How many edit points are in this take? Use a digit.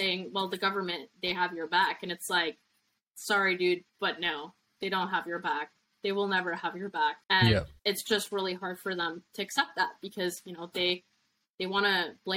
3